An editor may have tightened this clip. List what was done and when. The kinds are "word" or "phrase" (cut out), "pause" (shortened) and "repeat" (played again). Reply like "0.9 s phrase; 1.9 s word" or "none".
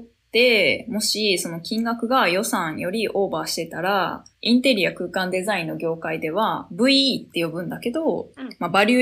4.3 s pause

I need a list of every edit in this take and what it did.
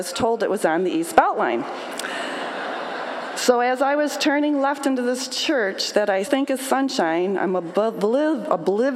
6.2 s word

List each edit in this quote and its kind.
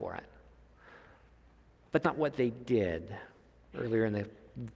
2.0 s word

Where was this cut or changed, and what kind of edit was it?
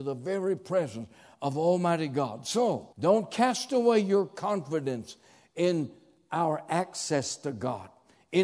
2.9 s pause

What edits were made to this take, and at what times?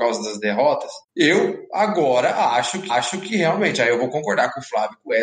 1.0 s pause; 2.9 s repeat

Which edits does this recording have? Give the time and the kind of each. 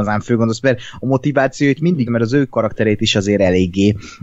2.1 s word

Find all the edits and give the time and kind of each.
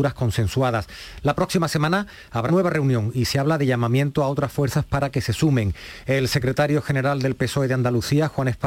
2.5 s word

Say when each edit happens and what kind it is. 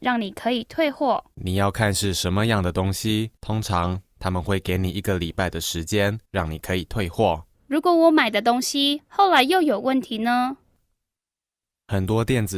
1.3 s pause; 3.4 s pause; 6.2 s pause; 7.5 s pause

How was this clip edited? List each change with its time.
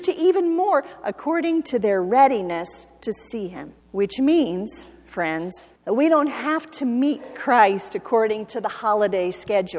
3.8 s pause; 5.8 s pause

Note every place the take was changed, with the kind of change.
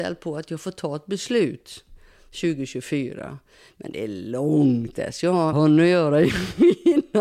4.9 s word; 5.5 s word

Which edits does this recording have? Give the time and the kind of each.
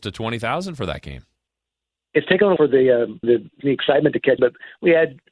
2.6 s word; 3.2 s word; 3.6 s word; 4.4 s word

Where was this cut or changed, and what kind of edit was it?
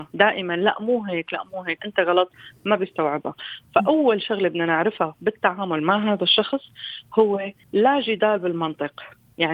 1.8 s word; 7.6 s pause

